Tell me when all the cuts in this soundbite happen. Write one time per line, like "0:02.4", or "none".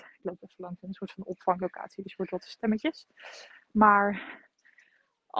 none